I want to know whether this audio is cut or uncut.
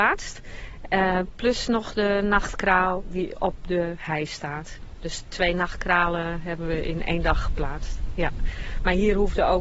uncut